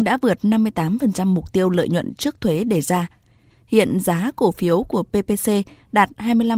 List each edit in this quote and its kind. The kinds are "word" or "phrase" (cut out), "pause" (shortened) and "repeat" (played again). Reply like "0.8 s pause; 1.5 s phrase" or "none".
none